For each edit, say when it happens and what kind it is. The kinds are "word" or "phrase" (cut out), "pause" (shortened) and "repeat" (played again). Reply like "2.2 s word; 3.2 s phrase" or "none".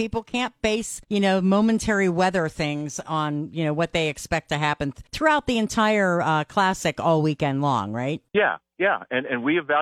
1.0 s pause; 5.1 s pause; 8.3 s pause